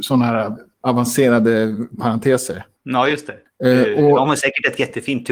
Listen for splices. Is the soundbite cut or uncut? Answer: uncut